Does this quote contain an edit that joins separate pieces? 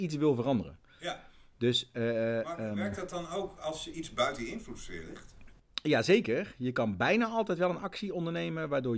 no; 0 cuts

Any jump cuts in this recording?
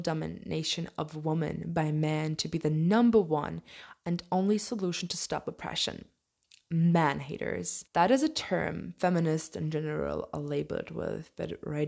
yes; 1 cut; at 7.9 s

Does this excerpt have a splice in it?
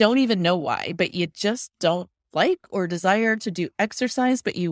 no; 0 cuts

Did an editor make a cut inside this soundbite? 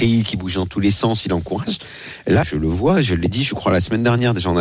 yes; 1 cut; at 2.4 s

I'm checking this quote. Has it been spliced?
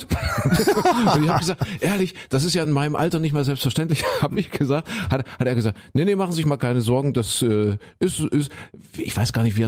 no; 0 cuts

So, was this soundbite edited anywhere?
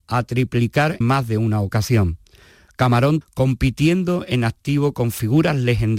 yes; 2 cuts; at 1.0 s, 3.2 s

